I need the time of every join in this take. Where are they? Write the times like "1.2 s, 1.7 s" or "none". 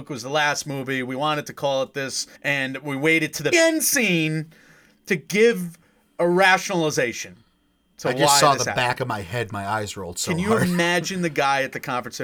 2.3 s, 3.5 s